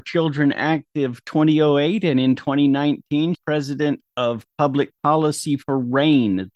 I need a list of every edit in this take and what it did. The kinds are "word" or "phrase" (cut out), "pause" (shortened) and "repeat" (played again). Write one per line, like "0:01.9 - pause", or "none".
0:03.3 - phrase
0:04.1 - pause